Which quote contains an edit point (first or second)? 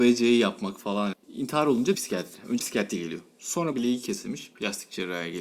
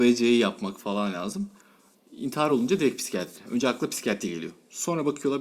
first